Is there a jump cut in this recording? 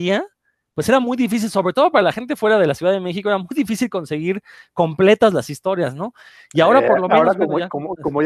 no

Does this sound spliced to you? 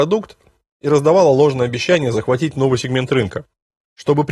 no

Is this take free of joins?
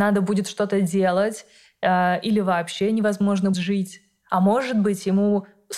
no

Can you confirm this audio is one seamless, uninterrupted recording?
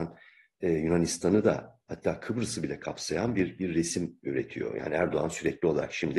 yes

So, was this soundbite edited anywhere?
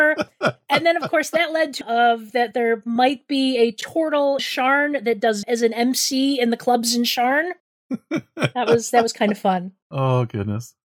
yes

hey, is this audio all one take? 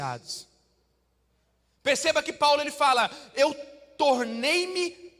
yes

